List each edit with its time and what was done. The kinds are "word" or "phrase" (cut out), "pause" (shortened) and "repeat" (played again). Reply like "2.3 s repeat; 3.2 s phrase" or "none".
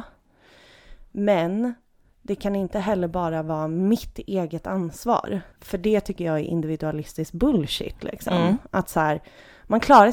5.5 s pause